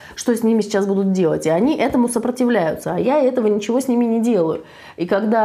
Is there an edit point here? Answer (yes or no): no